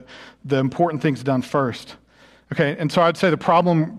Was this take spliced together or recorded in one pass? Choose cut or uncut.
uncut